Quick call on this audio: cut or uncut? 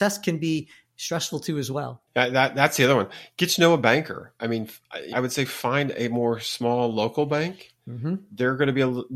cut